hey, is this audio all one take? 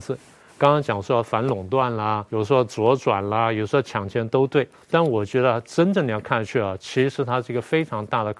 no; 2 cuts; at 2.3 s, 4.7 s

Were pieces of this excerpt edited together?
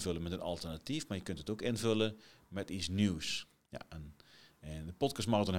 no; 0 cuts

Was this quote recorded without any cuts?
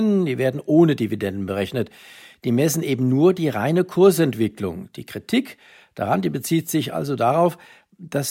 yes; 0 cuts

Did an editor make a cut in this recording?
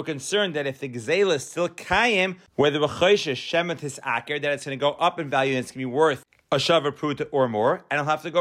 no; 0 cuts

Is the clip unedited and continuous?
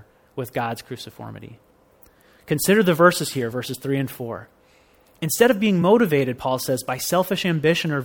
yes; 0 cuts

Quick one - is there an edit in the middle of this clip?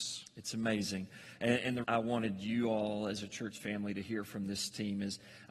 yes; 1 cut; at 1.8 s

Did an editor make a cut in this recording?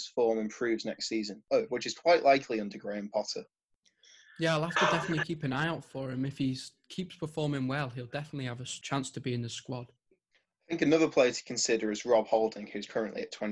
no; 0 cuts

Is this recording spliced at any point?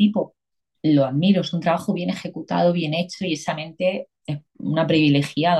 yes; 1 cut; at 4.1 s

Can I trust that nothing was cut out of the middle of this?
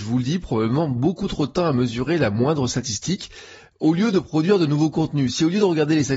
yes; 0 cuts

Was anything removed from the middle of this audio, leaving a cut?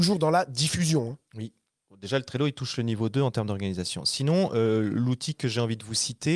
no; 0 cuts

